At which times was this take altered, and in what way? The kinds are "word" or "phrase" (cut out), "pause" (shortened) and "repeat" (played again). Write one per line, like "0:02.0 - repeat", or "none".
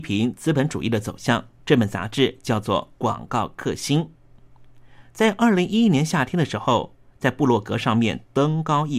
0:01.6 - pause